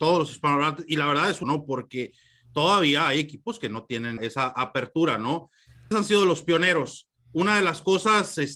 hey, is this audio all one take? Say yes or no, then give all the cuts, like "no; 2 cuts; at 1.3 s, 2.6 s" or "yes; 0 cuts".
no; 3 cuts; at 1.4 s, 4.2 s, 5.9 s